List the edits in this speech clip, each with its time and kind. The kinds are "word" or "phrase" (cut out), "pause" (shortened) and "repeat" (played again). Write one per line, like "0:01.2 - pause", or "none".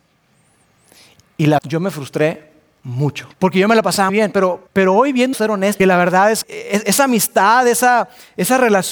0:01.6 - word
0:03.3 - pause
0:04.1 - word
0:04.7 - pause
0:05.3 - phrase
0:05.8 - phrase
0:06.4 - word